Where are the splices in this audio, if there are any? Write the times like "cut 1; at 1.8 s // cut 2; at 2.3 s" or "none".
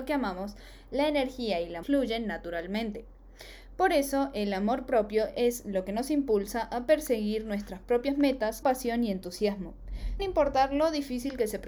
cut 1; at 1.8 s // cut 2; at 8.6 s // cut 3; at 10.2 s